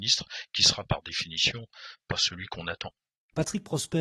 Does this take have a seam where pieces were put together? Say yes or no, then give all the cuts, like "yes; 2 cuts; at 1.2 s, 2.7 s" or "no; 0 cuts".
no; 0 cuts